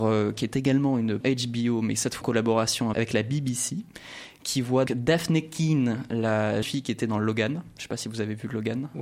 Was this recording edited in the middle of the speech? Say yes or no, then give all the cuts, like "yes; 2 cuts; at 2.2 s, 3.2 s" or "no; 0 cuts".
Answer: yes; 5 cuts; at 1.2 s, 2.2 s, 2.9 s, 4.9 s, 6.6 s